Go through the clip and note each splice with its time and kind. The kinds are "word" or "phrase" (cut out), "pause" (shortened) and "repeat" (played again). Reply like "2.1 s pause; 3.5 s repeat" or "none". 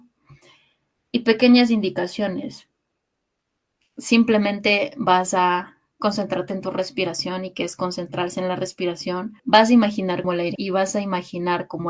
9.4 s pause; 10.2 s word; 10.6 s word